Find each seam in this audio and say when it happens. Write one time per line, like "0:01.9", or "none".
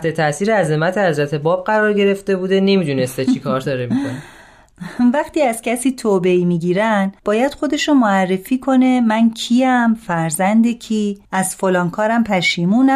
0:07.2
0:11.2